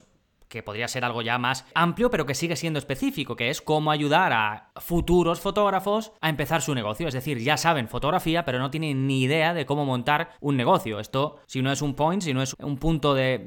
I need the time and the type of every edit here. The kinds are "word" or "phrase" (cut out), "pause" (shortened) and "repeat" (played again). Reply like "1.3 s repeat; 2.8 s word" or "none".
10.3 s pause; 12.0 s word; 12.5 s word